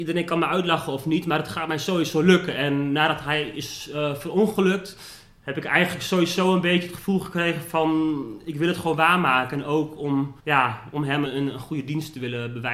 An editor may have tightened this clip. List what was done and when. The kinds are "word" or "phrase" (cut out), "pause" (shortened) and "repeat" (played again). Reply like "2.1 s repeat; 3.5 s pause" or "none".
10.4 s pause; 11.2 s word